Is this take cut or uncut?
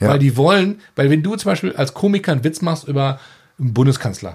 uncut